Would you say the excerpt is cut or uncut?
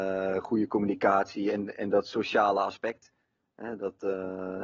uncut